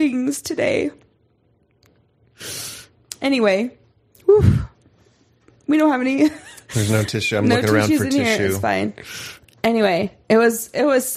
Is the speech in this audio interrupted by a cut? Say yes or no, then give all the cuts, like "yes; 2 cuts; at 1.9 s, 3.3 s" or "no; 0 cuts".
no; 0 cuts